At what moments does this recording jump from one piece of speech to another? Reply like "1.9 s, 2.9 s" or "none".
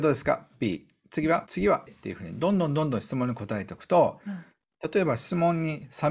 1.5 s, 1.9 s

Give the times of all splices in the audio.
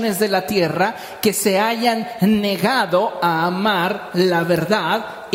none

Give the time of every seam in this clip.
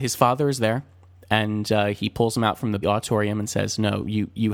2.8 s

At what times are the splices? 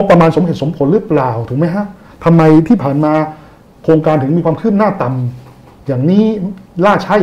none

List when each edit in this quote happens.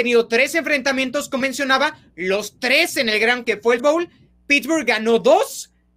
1.4 s, 3.4 s, 3.8 s

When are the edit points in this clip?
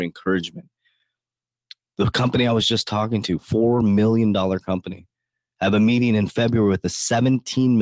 none

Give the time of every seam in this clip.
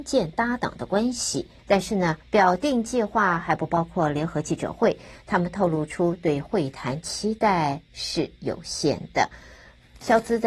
1.6 s, 2.2 s

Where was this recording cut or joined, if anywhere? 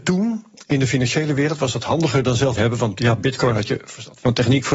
2.6 s

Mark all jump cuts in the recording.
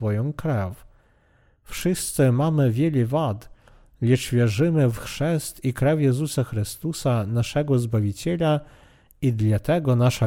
none

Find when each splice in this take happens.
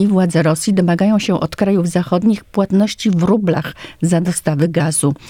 none

